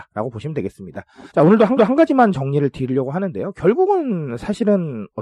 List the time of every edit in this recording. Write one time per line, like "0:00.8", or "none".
0:01.3
0:01.8